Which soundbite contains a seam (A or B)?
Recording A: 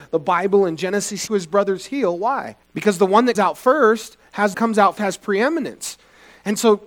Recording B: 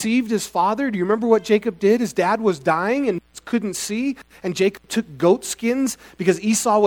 A